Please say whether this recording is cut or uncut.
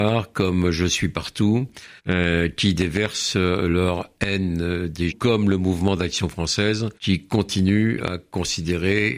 cut